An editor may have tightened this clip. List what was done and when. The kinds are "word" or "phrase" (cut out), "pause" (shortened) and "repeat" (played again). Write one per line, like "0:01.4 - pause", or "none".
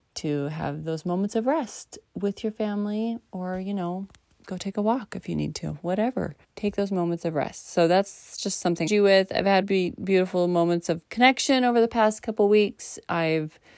0:06.4 - pause
0:08.9 - phrase
0:09.6 - word